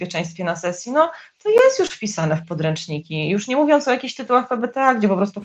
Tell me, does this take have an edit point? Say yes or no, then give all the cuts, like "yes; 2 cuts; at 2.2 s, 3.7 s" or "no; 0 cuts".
no; 0 cuts